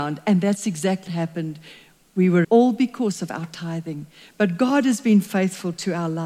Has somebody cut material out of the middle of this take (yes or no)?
yes